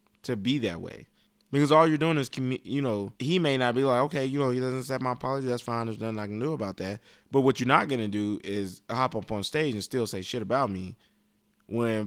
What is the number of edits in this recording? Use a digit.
2